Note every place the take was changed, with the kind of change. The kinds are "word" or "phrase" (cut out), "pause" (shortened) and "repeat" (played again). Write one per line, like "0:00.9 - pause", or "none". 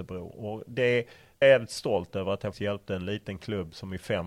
0:01.4 - phrase
0:02.5 - word